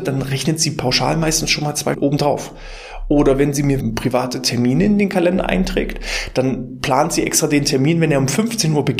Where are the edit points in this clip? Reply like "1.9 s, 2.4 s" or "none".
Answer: 1.9 s, 3.8 s

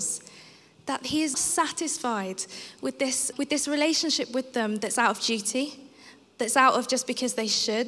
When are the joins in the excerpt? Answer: 1.3 s, 3.3 s

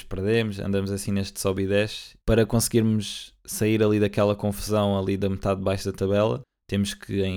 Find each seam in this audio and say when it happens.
2.2 s

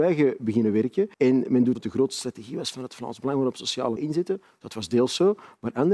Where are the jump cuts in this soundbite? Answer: 1.1 s, 1.7 s, 4.0 s

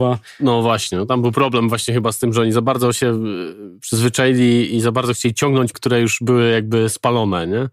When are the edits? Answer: 5.7 s

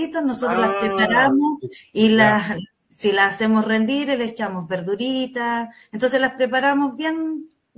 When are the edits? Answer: none

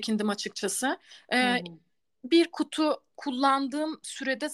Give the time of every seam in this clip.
none

